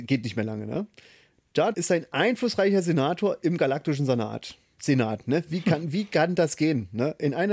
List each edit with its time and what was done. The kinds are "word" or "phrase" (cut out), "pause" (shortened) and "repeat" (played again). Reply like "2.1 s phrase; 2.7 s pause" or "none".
1.7 s word